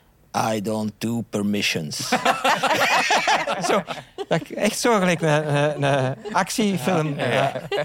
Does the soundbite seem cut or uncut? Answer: uncut